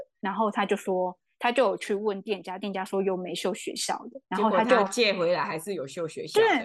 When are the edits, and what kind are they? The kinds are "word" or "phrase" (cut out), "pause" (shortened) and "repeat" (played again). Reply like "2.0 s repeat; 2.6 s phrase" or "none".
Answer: 4.2 s pause